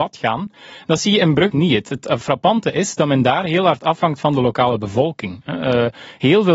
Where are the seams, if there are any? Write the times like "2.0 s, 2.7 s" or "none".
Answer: 1.5 s